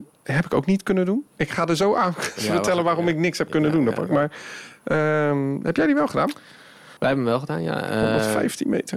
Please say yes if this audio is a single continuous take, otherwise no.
no